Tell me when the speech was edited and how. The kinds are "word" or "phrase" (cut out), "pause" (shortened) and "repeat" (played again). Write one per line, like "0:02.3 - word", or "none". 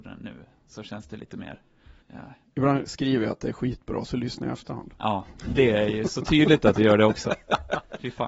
0:02.0 - pause